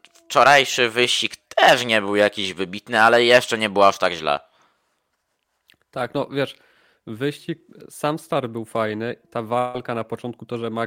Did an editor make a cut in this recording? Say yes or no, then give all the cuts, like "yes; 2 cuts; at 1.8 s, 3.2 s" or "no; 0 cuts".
no; 0 cuts